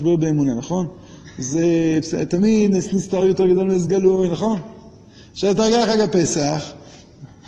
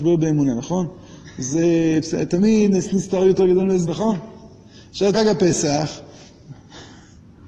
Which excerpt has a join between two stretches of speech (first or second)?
second